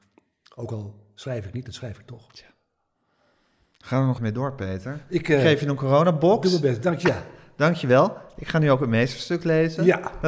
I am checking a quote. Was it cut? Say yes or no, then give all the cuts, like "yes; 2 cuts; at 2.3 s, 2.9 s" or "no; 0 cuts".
yes; 1 cut; at 4.2 s